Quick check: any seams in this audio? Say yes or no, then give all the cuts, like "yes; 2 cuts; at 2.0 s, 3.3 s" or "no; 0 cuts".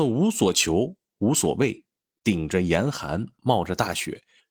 no; 0 cuts